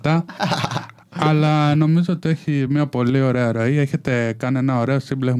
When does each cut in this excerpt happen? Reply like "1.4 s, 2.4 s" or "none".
none